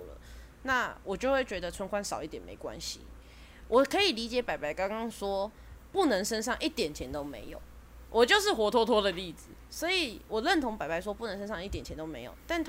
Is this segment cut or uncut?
uncut